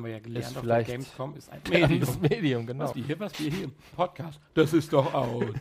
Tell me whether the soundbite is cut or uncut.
cut